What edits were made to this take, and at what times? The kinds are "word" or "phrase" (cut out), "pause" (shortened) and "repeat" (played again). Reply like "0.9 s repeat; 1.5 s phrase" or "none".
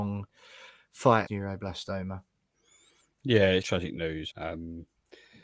1.3 s word; 3.6 s word; 4.3 s word